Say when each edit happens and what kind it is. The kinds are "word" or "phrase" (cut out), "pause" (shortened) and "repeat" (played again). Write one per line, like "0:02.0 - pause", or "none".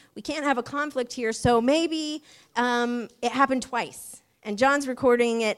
none